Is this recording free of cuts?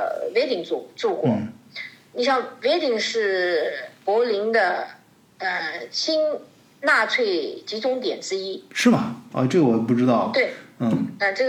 yes; 0 cuts

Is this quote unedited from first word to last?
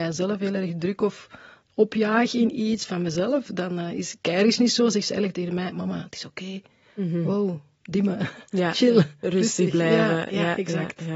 yes; 0 cuts

